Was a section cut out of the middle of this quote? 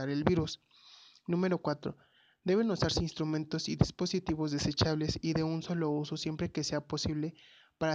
no; 0 cuts

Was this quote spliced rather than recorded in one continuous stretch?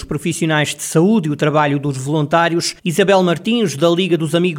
yes; 1 cut; at 2.8 s

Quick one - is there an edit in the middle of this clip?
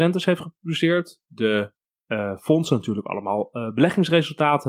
no; 0 cuts

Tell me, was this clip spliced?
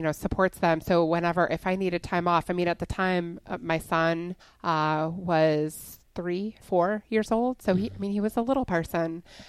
yes; 2 cuts; at 4.4 s, 6.6 s

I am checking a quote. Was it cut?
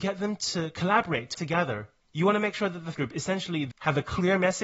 yes; 3 cuts; at 1.3 s, 2.9 s, 3.7 s

